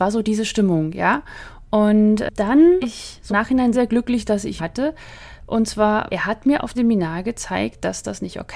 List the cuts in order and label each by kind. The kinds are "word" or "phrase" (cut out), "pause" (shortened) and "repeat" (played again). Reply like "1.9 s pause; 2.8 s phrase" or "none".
2.8 s word; 3.3 s word; 3.7 s word; 4.6 s word; 6.1 s word; 6.7 s word